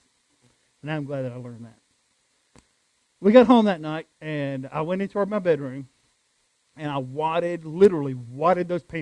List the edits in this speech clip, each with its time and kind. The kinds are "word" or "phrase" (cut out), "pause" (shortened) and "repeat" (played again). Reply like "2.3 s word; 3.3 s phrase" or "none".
4.1 s pause